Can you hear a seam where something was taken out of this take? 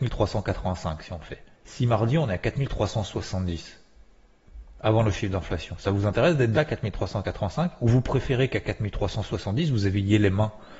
yes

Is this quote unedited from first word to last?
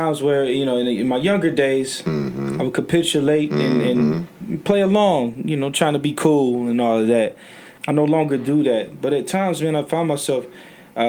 no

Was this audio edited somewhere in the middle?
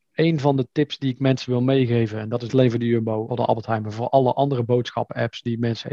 yes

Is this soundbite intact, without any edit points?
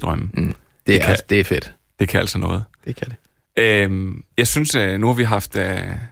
no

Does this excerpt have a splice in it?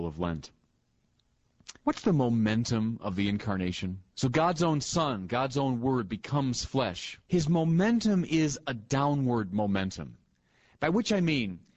yes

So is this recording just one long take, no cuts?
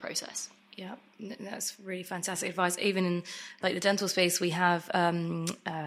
yes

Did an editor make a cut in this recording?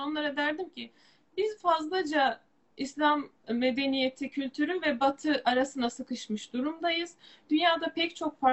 no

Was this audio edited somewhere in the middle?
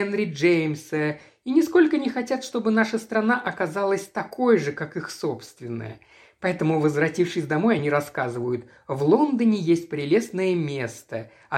no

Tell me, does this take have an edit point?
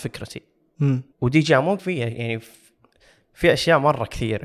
yes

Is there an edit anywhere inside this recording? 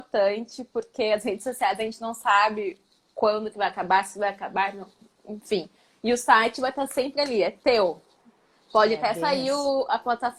no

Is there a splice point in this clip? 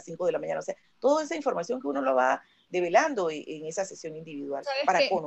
no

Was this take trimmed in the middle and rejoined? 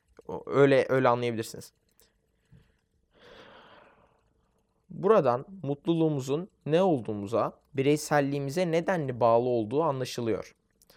yes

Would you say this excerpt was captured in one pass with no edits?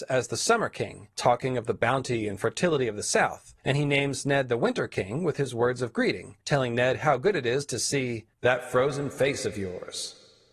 no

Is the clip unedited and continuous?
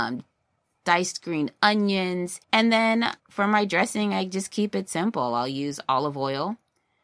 no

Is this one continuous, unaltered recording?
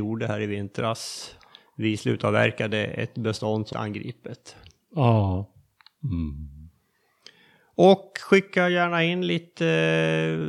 no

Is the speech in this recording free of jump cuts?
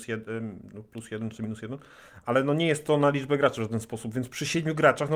yes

